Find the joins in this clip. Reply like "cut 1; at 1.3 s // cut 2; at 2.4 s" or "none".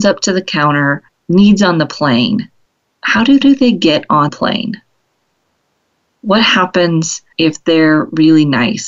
cut 1; at 1.1 s // cut 2; at 2.6 s // cut 3; at 3.4 s // cut 4; at 4.3 s // cut 5; at 7.3 s